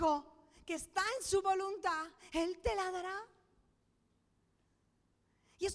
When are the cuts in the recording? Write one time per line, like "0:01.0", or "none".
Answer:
none